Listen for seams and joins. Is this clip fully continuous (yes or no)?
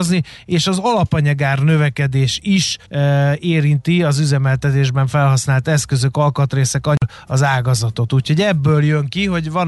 no